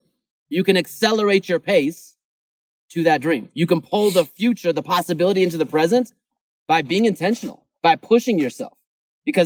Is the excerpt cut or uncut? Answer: uncut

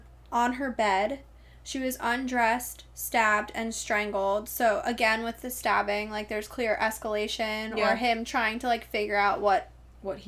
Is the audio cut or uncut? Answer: uncut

